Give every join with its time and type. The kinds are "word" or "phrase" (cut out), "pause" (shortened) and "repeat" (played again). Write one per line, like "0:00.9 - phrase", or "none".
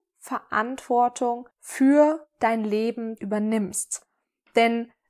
0:01.5 - pause
0:03.2 - word